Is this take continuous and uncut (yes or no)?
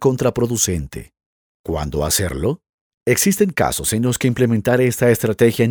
yes